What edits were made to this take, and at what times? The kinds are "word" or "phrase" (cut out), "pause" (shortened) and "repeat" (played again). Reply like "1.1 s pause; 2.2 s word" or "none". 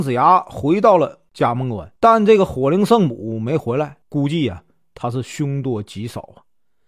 2.0 s pause; 4.0 s pause